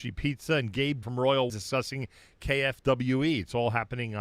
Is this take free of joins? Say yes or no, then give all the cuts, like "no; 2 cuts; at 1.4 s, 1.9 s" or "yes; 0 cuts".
no; 2 cuts; at 1.0 s, 1.5 s